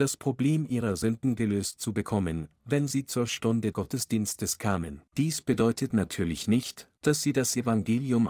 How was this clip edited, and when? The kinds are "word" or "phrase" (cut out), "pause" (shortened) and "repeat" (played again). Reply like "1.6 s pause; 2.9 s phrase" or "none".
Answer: 3.7 s word; 5.1 s pause